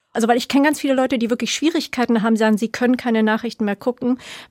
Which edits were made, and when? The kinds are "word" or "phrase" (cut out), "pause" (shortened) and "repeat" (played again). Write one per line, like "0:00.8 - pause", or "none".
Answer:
none